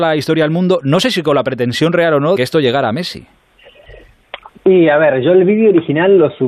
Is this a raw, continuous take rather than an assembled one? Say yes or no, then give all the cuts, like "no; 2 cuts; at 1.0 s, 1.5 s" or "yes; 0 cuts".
no; 1 cut; at 2.4 s